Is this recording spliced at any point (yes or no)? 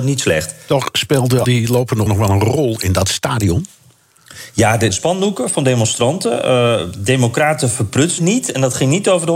yes